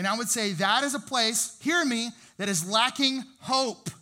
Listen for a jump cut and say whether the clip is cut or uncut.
uncut